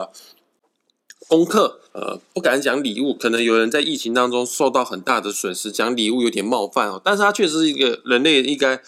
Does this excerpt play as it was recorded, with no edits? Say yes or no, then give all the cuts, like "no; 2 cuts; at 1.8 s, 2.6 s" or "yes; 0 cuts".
no; 1 cut; at 1.9 s